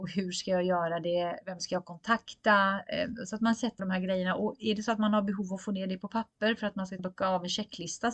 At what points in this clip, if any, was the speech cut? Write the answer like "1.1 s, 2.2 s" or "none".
3.8 s, 7.0 s